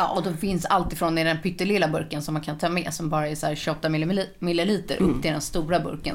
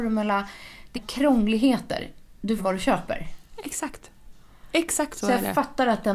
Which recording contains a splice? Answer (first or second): second